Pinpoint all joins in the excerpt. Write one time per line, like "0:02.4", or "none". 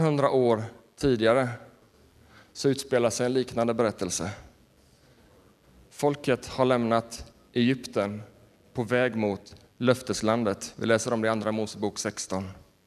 none